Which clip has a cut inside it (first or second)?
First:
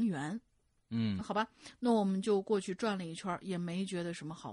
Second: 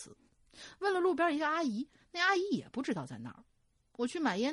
first